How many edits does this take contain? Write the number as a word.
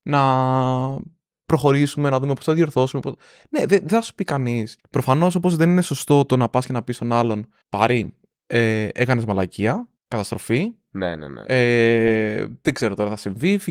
three